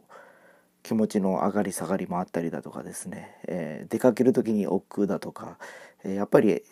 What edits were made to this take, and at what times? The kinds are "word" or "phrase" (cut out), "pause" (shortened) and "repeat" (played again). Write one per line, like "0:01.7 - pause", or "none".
none

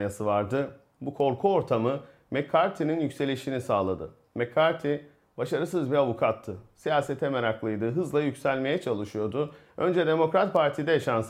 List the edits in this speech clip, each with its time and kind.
none

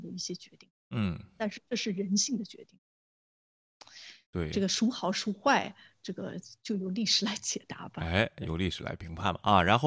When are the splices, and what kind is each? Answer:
none

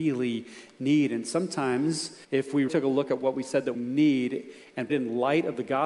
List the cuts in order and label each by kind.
0:02.2 - pause
0:02.7 - word
0:03.7 - word
0:04.9 - phrase

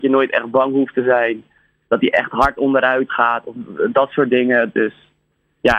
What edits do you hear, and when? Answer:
none

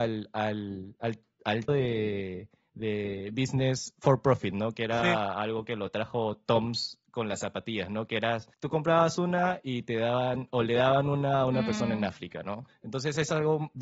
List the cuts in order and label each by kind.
0:01.7 - word
0:08.5 - pause

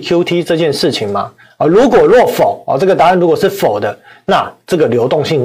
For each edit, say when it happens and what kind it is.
none

